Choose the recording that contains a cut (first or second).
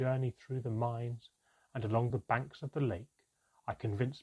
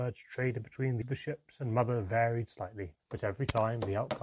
second